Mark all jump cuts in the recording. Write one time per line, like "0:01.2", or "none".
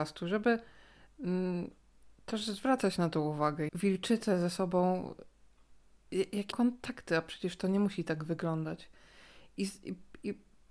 0:03.7
0:06.5